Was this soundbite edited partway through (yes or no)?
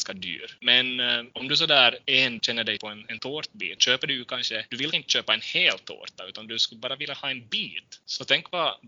yes